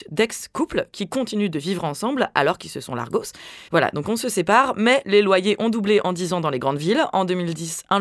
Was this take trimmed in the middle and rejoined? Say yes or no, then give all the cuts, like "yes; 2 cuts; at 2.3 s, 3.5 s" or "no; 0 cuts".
yes; 1 cut; at 3.7 s